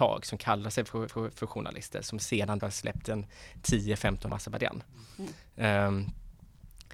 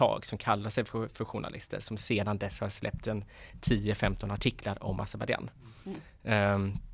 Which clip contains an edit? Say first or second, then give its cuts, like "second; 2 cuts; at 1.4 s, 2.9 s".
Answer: first; 3 cuts; at 1.1 s, 2.6 s, 4.3 s